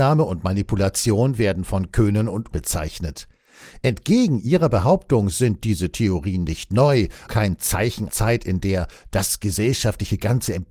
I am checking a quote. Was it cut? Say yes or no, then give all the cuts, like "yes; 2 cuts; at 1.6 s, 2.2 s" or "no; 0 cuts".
yes; 3 cuts; at 2.5 s, 7.3 s, 8.1 s